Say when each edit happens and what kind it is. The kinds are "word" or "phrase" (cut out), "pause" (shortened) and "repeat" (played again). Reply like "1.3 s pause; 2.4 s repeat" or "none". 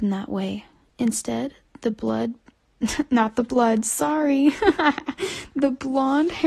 none